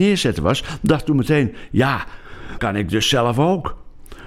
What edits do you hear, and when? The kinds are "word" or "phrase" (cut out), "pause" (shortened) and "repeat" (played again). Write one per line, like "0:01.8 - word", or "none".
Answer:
0:02.6 - word